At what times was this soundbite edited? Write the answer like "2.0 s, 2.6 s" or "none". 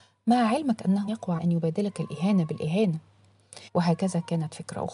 1.1 s, 1.4 s, 3.7 s